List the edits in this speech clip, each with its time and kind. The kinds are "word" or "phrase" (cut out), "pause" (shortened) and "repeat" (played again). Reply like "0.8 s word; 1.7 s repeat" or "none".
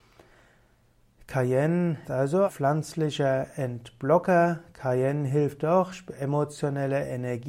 2.0 s word; 2.5 s word